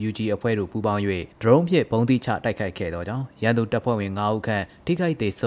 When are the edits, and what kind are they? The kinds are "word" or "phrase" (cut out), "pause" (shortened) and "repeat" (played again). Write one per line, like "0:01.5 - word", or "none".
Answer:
0:01.3 - pause